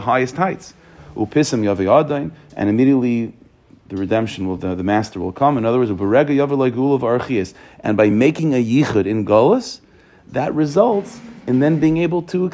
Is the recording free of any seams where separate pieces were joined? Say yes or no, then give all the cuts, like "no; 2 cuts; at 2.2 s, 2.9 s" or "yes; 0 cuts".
yes; 0 cuts